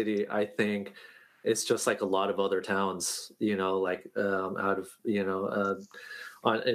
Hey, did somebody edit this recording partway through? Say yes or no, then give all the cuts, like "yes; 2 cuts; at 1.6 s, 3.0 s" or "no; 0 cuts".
no; 0 cuts